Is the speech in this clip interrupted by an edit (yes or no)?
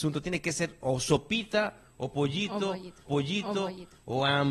yes